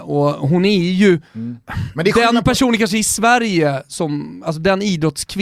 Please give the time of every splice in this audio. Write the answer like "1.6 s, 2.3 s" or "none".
1.3 s

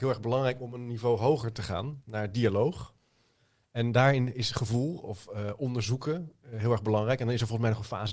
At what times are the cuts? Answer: none

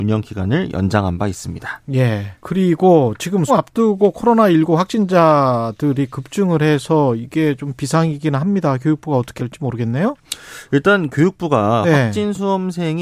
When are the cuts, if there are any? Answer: 2.4 s, 3.5 s, 9.4 s

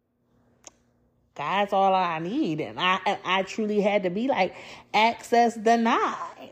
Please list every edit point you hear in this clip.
none

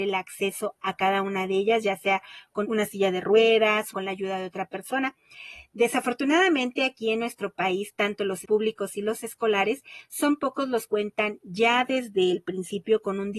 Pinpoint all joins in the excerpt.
2.6 s, 3.9 s, 8.4 s, 10.9 s

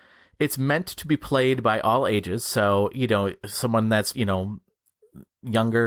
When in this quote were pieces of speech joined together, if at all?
4.1 s

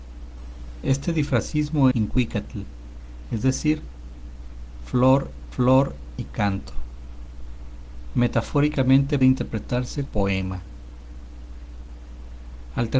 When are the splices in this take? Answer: 1.9 s, 5.5 s, 9.2 s, 10.1 s

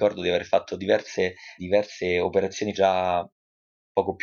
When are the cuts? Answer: 1.6 s, 2.7 s

